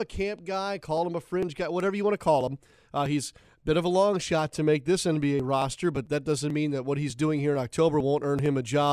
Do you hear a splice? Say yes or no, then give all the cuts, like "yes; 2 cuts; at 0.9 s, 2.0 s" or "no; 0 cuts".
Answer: no; 0 cuts